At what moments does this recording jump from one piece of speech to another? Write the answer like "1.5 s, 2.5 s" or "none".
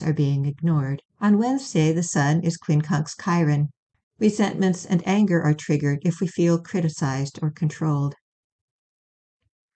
1.1 s, 3.9 s

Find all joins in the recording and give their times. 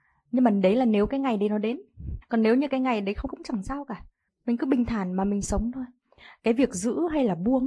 2.2 s, 3.3 s, 4.3 s

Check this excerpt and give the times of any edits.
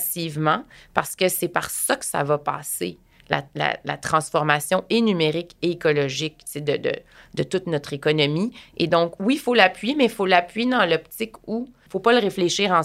none

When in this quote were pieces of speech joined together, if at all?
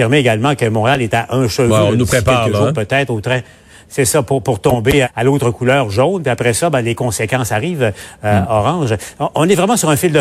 5.0 s

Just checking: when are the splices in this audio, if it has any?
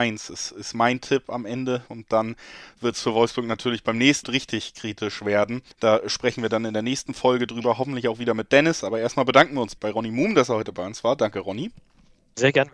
1.9 s, 4.2 s, 5.7 s, 9.8 s

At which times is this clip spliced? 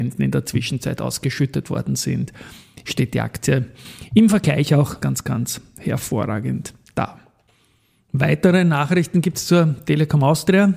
5.0 s

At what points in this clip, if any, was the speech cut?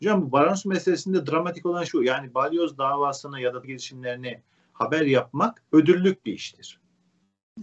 1.9 s, 3.6 s, 5.7 s

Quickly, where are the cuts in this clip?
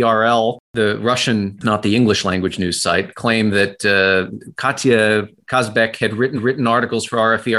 1.6 s, 6.3 s

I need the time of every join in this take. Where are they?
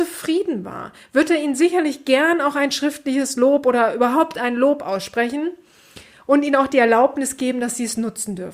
none

